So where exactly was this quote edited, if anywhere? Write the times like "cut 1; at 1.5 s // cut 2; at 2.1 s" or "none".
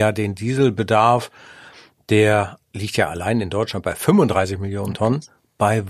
cut 1; at 2.6 s

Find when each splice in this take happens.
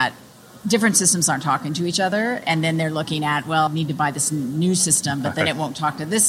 cut 1; at 3.7 s

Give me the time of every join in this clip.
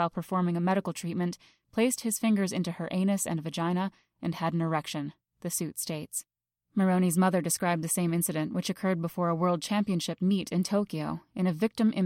none

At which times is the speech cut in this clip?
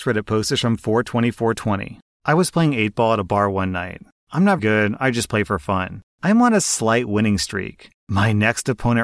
cut 1; at 4.6 s

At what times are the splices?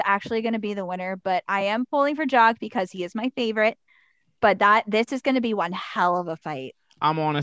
none

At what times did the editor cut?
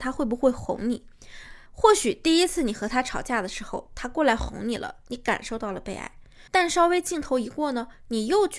cut 1; at 1.7 s // cut 2; at 6.5 s

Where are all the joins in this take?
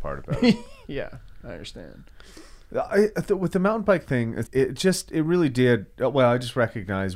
cut 1; at 4.5 s

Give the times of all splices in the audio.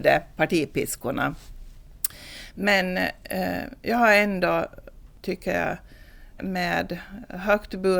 cut 1; at 6.4 s

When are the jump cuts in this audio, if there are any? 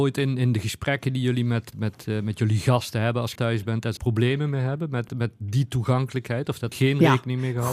cut 1; at 1.7 s // cut 2; at 3.4 s // cut 3; at 4.0 s // cut 4; at 5.1 s // cut 5; at 6.7 s

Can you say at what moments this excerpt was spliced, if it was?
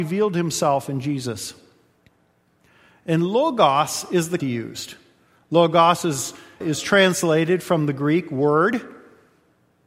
cut 1; at 4.4 s // cut 2; at 6.6 s

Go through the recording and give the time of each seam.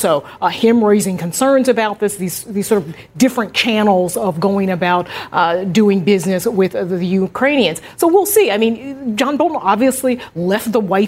none

